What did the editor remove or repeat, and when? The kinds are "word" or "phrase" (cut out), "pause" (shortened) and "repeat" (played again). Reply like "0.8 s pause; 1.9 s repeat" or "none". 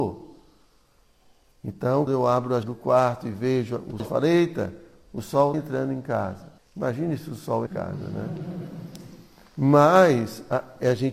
2.1 s word; 2.6 s word; 4.0 s word; 5.5 s word; 6.6 s pause; 7.7 s phrase